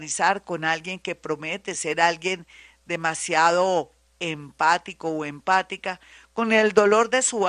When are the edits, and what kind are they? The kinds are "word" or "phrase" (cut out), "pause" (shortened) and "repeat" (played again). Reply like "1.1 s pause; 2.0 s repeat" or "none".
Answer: none